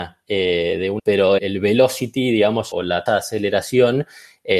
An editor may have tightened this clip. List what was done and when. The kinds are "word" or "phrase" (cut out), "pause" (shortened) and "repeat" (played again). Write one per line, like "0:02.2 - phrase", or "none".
0:01.0 - word
0:01.4 - word
0:02.7 - word
0:03.1 - word